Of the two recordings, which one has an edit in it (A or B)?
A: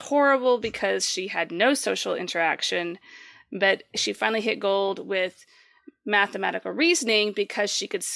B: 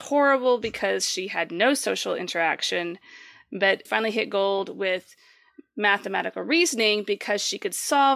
B